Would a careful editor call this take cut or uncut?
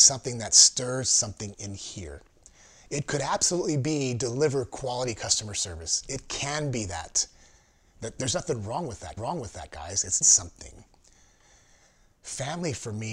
cut